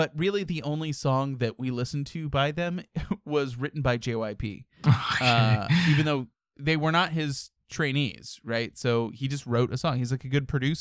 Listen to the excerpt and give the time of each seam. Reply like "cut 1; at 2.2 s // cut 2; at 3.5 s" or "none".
none